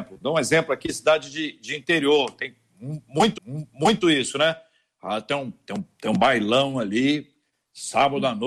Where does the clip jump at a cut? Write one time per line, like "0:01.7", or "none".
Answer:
0:03.4